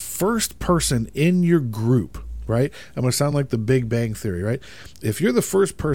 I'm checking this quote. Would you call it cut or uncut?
uncut